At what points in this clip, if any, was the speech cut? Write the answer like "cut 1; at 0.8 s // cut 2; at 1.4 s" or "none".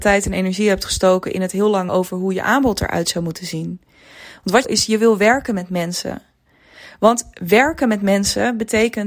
cut 1; at 1.9 s // cut 2; at 4.6 s